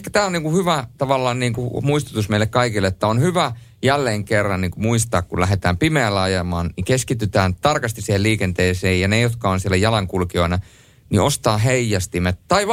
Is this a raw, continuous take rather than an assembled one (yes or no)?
yes